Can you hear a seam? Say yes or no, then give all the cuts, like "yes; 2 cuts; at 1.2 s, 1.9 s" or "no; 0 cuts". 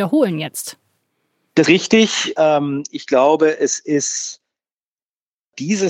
yes; 1 cut; at 1.6 s